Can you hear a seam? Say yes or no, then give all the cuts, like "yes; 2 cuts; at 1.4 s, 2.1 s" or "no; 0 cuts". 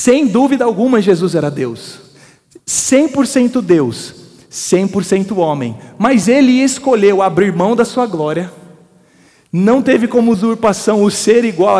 no; 0 cuts